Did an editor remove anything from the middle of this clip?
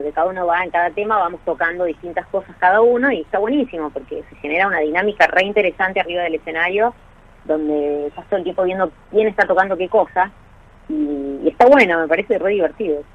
no; 0 cuts

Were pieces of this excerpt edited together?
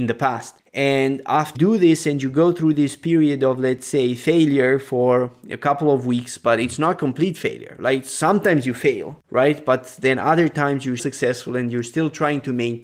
yes; 3 cuts; at 1.5 s, 9.2 s, 11.0 s

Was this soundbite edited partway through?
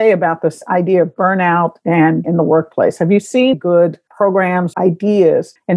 yes; 3 cuts; at 2.2 s, 3.5 s, 4.7 s

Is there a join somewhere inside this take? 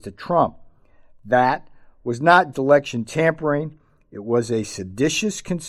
yes; 1 cut; at 2.5 s

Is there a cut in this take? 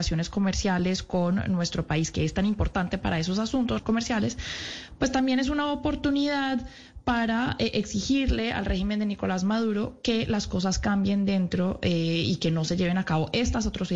yes; 1 cut; at 3.8 s

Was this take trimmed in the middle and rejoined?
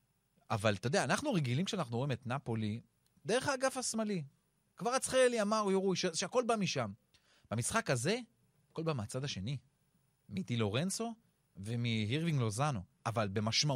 no; 0 cuts

